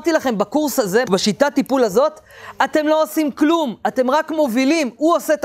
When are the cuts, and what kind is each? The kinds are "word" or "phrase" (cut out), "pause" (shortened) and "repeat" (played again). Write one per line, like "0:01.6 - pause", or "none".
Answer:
0:01.0 - word